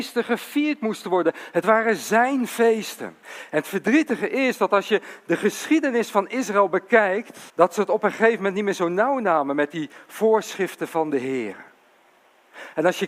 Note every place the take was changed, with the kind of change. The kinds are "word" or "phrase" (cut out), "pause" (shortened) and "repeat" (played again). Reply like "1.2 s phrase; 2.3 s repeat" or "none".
3.2 s pause; 7.5 s pause